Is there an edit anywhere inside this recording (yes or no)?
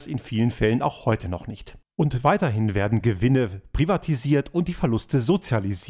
yes